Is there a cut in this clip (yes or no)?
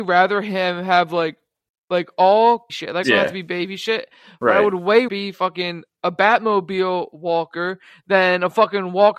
yes